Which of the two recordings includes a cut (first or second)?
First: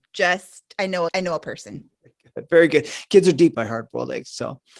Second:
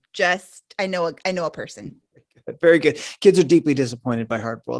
first